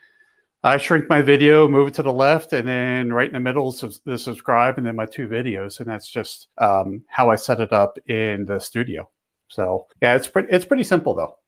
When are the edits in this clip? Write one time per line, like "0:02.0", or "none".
0:06.5
0:09.9